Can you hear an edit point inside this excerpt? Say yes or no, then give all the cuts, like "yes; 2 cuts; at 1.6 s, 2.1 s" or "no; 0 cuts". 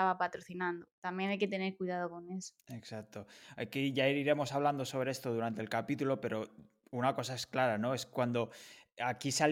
no; 0 cuts